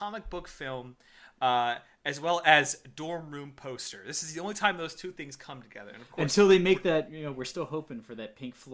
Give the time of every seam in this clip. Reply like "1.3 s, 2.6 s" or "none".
none